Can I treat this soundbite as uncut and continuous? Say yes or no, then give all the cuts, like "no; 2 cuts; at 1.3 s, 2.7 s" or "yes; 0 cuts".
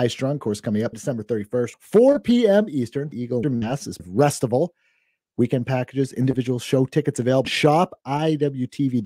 no; 6 cuts; at 0.9 s, 1.7 s, 3.1 s, 3.4 s, 4.0 s, 7.4 s